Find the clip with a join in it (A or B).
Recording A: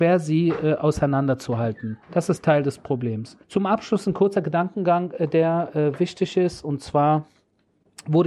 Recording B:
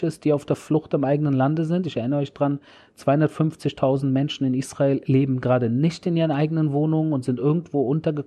A